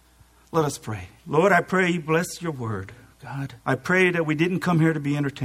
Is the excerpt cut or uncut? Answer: cut